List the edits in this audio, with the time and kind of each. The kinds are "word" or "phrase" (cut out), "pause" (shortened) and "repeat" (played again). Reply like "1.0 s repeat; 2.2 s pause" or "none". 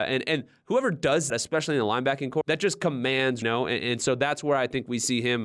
1.3 s word; 2.4 s word; 3.4 s phrase